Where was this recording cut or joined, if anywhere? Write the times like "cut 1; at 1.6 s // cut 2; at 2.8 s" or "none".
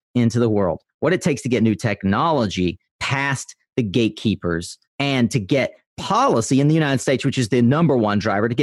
none